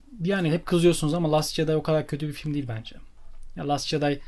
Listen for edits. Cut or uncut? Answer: uncut